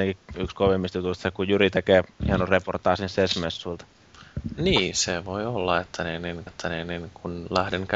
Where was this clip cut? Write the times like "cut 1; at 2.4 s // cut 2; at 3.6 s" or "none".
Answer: cut 1; at 6.5 s